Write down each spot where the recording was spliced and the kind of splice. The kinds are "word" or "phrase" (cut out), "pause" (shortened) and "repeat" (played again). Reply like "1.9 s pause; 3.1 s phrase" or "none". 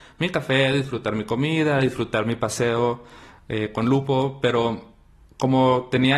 none